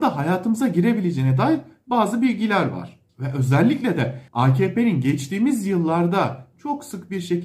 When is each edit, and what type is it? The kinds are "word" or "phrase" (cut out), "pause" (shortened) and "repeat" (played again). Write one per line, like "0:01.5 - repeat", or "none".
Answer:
0:03.1 - pause
0:04.3 - pause